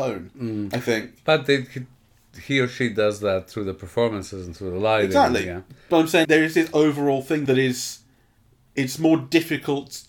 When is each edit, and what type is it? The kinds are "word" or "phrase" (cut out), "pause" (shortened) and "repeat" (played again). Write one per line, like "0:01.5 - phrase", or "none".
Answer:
0:06.2 - word